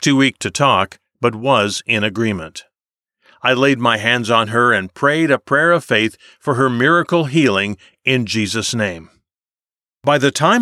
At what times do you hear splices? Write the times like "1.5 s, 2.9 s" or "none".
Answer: none

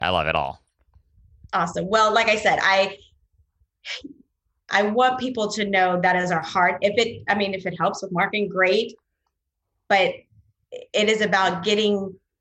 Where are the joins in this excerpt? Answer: none

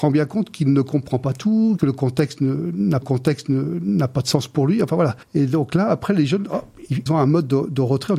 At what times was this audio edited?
1.8 s, 3.0 s, 5.2 s, 7.1 s

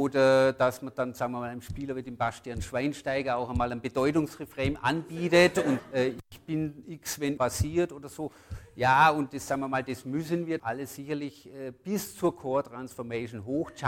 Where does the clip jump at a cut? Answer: 5.8 s, 7.4 s, 10.6 s

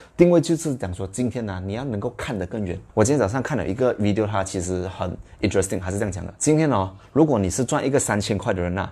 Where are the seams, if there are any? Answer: 2.9 s, 6.4 s

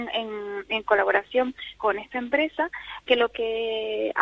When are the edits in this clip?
1.8 s, 3.0 s

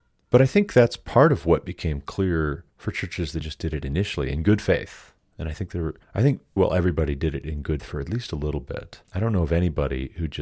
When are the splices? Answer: 2.7 s, 3.4 s, 6.0 s, 6.6 s, 7.8 s, 9.0 s

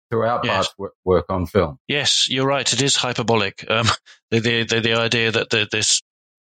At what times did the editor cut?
none

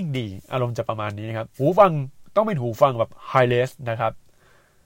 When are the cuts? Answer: 1.5 s

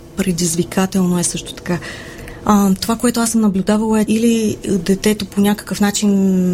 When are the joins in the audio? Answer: 4.1 s

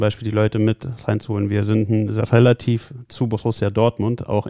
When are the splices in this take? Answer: 3.1 s

